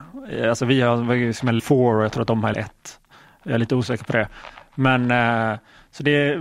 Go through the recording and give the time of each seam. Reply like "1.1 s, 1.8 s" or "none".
1.6 s, 2.5 s